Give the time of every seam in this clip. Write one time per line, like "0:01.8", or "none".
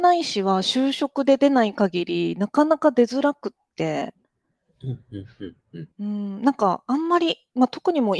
0:05.9